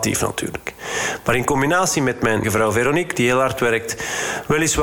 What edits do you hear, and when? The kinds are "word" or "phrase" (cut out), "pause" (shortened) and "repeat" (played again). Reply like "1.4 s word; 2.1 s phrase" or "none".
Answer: 2.4 s word